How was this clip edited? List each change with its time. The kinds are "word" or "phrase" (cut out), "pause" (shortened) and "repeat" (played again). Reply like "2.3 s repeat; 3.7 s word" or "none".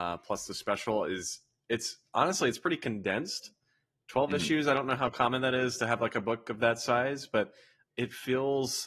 7.9 s word